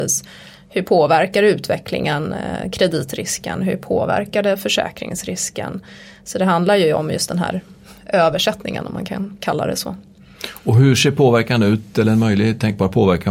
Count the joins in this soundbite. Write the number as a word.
zero